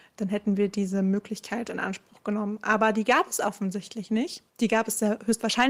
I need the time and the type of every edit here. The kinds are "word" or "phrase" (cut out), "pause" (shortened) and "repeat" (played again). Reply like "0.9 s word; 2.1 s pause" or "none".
4.5 s pause

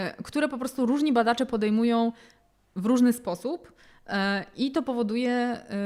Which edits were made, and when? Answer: none

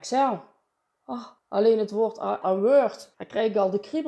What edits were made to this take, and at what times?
1.4 s pause; 2.4 s word; 3.1 s word

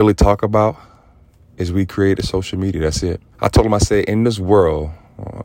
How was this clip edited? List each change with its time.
3.3 s pause

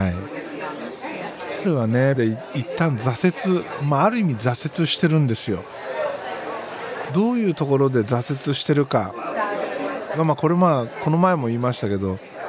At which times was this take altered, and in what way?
1.6 s word; 2.1 s word

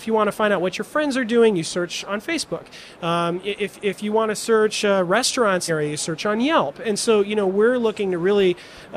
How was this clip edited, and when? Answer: 5.7 s phrase

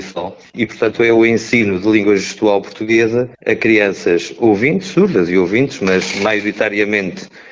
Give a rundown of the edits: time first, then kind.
3.3 s pause

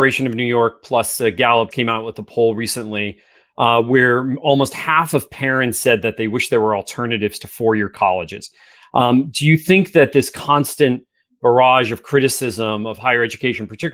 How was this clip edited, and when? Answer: 1.7 s word

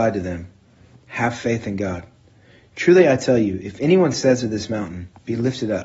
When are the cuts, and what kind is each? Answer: none

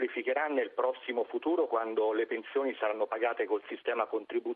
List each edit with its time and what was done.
none

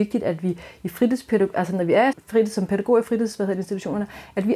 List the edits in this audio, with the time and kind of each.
2.1 s word

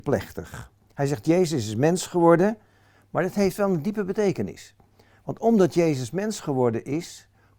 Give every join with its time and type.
none

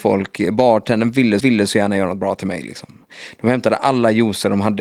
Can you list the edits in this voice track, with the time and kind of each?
1.4 s repeat

